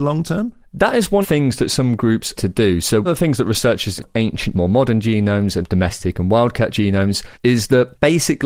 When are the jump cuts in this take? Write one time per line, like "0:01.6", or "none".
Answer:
0:01.2
0:02.4
0:03.0
0:04.0
0:04.5
0:05.6
0:07.3